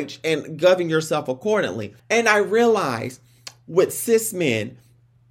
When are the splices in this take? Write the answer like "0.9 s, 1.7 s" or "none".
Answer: 2.0 s